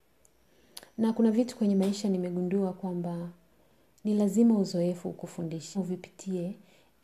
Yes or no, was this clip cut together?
yes